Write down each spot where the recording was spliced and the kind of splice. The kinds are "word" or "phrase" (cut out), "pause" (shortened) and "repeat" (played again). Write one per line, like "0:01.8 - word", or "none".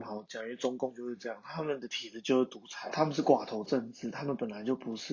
0:02.9 - phrase